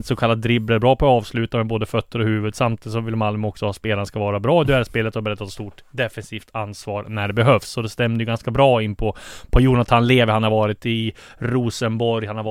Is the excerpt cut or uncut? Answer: uncut